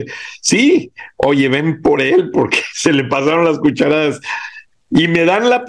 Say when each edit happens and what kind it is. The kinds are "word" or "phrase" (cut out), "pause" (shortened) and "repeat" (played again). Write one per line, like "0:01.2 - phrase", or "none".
none